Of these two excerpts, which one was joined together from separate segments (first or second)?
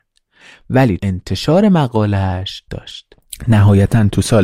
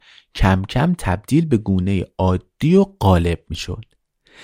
first